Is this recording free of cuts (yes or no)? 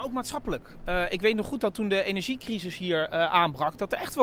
yes